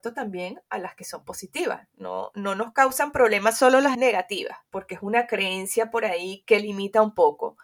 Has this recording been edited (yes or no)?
yes